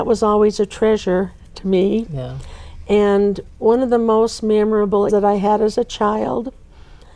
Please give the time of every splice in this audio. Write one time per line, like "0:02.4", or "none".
0:05.1